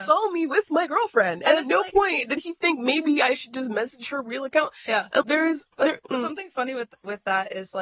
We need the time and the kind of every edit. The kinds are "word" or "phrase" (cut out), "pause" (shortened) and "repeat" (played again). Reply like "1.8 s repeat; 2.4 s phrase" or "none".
5.2 s word; 5.7 s pause